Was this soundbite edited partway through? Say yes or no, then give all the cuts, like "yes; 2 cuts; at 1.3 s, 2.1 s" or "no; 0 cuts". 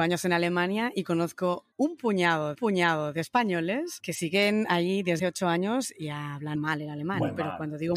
yes; 4 cuts; at 1.7 s, 2.5 s, 5.2 s, 6.5 s